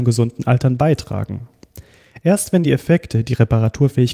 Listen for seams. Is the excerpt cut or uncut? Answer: uncut